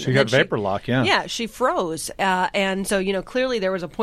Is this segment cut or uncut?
uncut